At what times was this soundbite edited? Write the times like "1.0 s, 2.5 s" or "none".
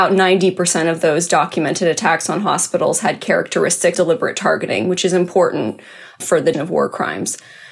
3.9 s, 6.5 s